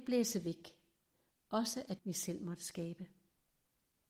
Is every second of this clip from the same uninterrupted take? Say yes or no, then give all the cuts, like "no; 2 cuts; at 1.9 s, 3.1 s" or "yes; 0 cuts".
no; 1 cut; at 2.0 s